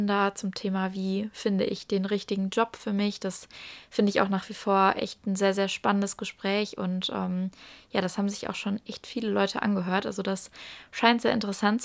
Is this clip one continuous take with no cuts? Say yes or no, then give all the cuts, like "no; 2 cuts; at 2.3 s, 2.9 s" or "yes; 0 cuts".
yes; 0 cuts